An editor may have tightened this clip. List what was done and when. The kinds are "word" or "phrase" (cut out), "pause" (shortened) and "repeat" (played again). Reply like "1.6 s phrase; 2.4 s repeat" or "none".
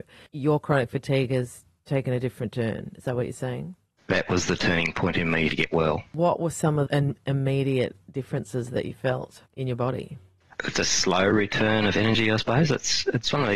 5.5 s word; 6.9 s word; 10.7 s word